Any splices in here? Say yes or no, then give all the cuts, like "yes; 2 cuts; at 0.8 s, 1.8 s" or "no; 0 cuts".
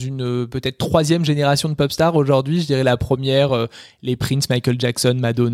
no; 0 cuts